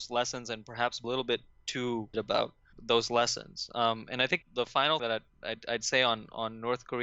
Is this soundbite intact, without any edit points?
no; 5 cuts; at 1.0 s, 2.1 s, 2.7 s, 4.4 s, 5.0 s

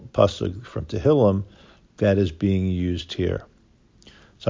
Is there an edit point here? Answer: no; 0 cuts

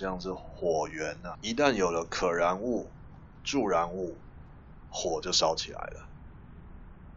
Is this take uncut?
no; 1 cut; at 1.3 s

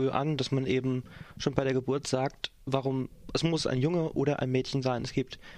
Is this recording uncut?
yes; 0 cuts

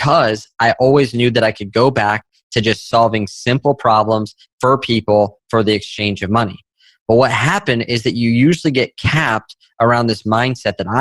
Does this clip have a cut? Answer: no; 0 cuts

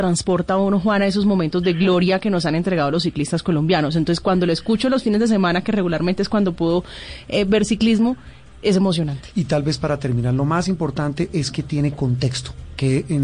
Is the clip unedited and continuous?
yes; 0 cuts

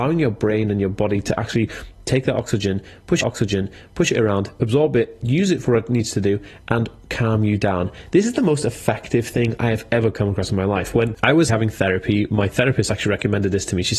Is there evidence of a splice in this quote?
yes; 2 cuts; at 3.2 s, 11.5 s

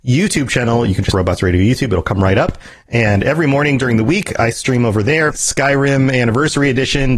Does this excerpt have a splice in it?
yes; 2 cuts; at 1.1 s, 5.3 s

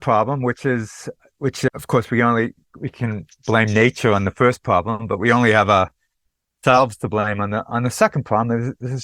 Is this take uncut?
yes; 0 cuts

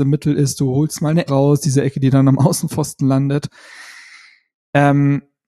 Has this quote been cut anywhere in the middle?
yes; 1 cut; at 1.3 s

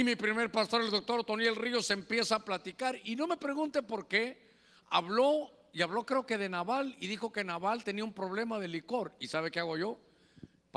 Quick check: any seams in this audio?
no; 0 cuts

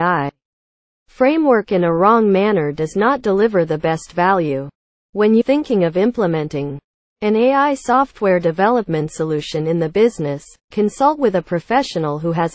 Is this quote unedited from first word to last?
no; 1 cut; at 5.4 s

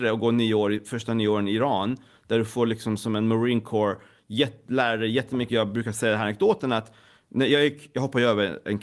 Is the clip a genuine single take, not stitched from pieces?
yes; 0 cuts

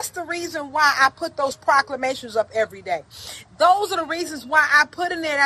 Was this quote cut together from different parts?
no; 0 cuts

